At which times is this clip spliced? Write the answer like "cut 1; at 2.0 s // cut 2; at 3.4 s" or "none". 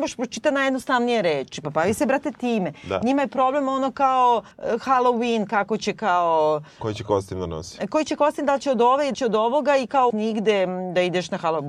cut 1; at 4.5 s // cut 2; at 9.1 s // cut 3; at 10.1 s